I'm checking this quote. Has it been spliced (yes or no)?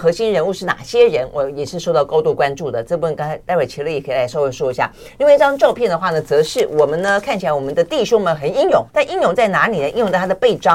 yes